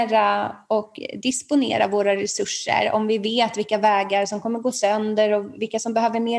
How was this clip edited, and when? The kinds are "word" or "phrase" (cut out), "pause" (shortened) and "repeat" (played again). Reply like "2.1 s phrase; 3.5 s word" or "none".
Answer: none

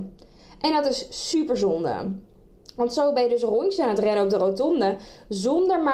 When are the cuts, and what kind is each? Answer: none

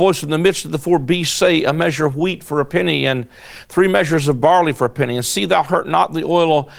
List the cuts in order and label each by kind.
none

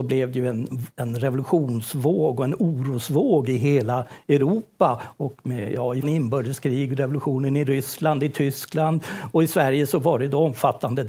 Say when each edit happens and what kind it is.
0.9 s pause; 6.0 s word

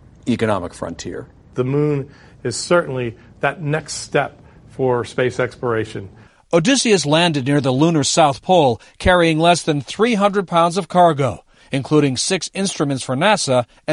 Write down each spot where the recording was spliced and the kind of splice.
none

